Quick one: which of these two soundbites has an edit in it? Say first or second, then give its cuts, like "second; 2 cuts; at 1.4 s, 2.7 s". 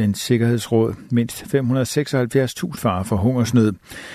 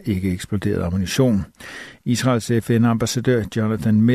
first; 1 cut; at 2.8 s